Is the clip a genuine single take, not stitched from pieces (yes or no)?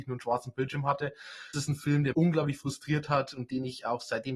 no